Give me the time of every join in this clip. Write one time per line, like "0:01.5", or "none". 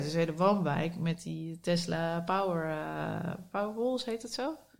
none

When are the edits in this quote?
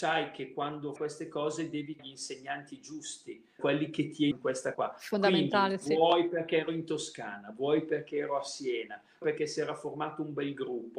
0:01.0
0:02.0
0:03.6
0:04.3
0:04.7
0:09.2

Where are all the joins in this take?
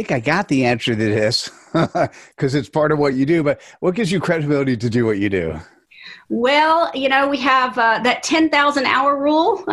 none

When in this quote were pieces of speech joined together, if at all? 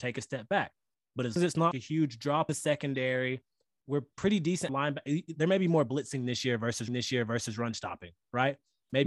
0:01.4
0:01.7
0:02.5
0:04.7
0:06.9

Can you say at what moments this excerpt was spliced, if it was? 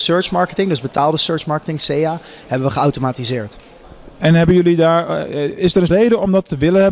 0:05.9

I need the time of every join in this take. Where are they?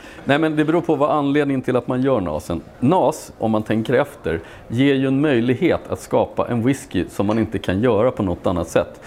0:02.7

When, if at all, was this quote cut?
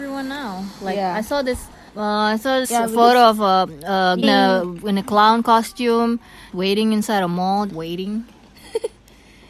0:01.9
0:02.6
0:04.2
0:06.5
0:07.7

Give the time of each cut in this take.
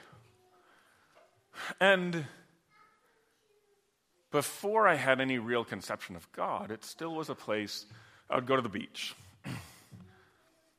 none

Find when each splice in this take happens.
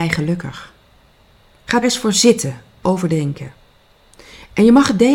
0:01.8
0:02.8

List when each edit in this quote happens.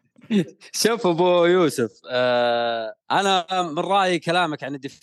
0:03.0

